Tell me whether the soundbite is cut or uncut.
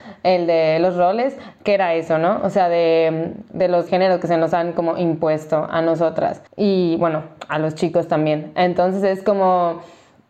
cut